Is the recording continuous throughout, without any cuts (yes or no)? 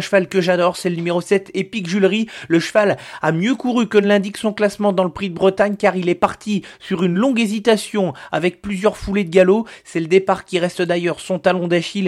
yes